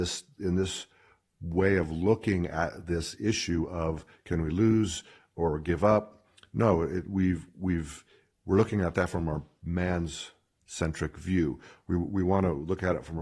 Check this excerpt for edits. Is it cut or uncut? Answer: uncut